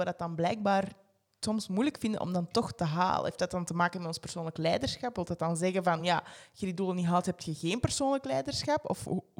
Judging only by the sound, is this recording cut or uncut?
uncut